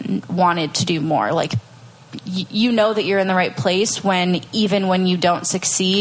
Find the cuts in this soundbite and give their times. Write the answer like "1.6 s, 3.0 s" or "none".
none